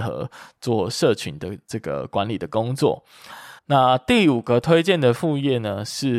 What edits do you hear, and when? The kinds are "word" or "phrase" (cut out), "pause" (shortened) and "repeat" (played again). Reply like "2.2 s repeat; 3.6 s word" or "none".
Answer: 3.6 s pause